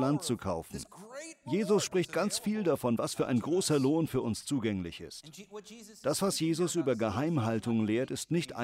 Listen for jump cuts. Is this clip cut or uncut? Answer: uncut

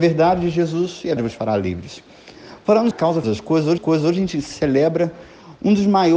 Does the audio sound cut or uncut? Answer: cut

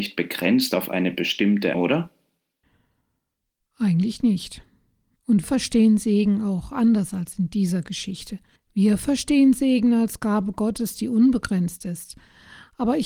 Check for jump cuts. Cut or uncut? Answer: cut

